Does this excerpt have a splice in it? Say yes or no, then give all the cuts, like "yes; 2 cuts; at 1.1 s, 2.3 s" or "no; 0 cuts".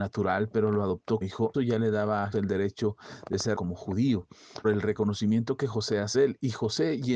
yes; 6 cuts; at 1.2 s, 1.5 s, 2.3 s, 3.6 s, 4.6 s, 6.1 s